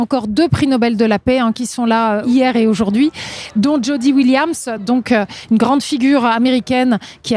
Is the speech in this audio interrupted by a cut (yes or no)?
no